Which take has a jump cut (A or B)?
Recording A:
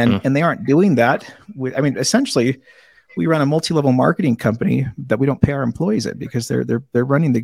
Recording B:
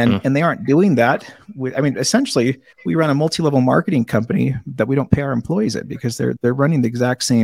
B